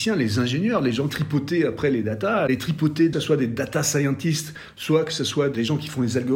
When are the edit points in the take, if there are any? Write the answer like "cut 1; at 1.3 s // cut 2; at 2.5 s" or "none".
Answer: cut 1; at 1.1 s // cut 2; at 3.1 s

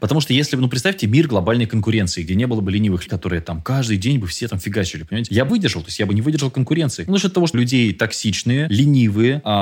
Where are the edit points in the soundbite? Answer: cut 1; at 3.1 s // cut 2; at 5.5 s // cut 3; at 7.5 s

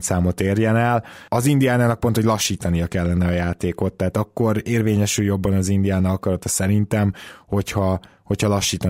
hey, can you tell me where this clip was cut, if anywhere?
none

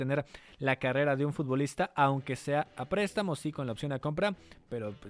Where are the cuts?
none

